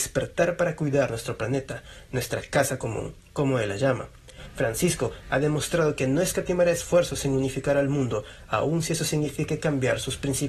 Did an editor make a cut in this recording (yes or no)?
no